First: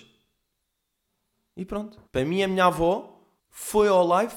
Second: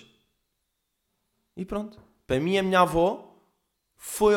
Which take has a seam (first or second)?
first